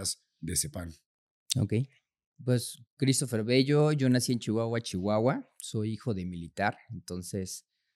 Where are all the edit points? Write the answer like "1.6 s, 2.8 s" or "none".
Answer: none